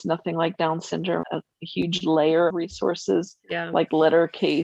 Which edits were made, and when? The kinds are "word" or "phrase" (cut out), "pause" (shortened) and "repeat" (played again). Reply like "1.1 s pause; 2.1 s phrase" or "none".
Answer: 1.2 s phrase; 2.5 s word